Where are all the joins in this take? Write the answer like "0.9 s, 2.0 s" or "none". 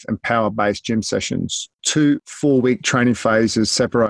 1.7 s